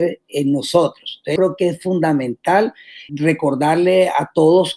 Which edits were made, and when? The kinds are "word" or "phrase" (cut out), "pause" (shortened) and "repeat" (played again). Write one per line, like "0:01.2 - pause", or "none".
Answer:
0:01.4 - word
0:03.1 - word